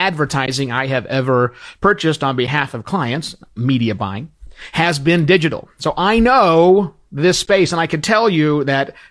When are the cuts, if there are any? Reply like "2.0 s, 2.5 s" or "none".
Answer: none